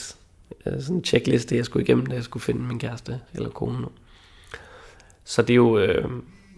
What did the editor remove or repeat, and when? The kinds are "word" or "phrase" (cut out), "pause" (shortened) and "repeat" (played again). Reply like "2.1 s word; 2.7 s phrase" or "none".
none

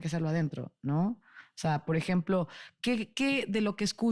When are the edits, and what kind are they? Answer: none

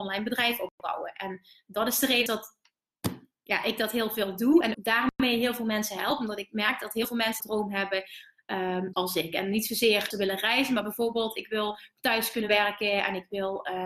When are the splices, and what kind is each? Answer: 2.3 s word; 4.7 s word; 7.4 s word; 8.9 s word; 10.1 s word

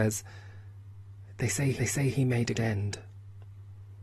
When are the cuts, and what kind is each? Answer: 1.8 s repeat; 2.5 s word

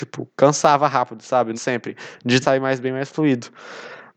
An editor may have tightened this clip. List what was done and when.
1.5 s phrase; 2.4 s word

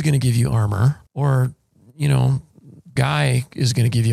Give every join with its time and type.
1.1 s pause; 3.0 s word

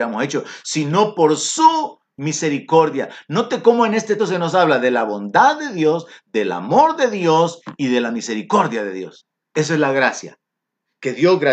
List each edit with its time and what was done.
4.2 s word; 9.4 s pause

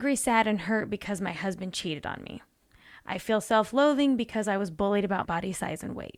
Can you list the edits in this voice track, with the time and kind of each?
5.2 s word

